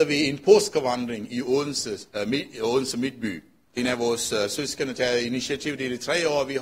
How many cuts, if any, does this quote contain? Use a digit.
2